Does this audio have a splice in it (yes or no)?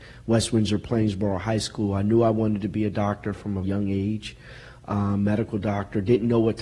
yes